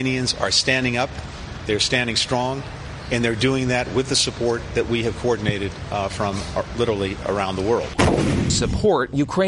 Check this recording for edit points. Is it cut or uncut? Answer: uncut